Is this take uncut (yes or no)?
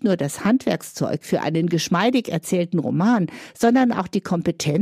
yes